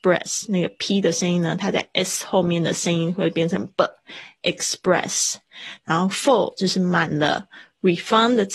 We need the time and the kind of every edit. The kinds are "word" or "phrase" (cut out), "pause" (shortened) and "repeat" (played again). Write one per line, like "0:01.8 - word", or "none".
none